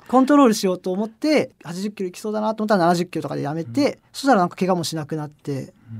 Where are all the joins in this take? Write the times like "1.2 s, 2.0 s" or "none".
4.1 s